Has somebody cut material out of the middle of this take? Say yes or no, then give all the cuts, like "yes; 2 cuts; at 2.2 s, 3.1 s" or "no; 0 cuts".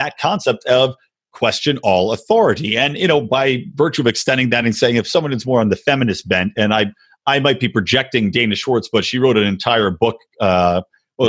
no; 0 cuts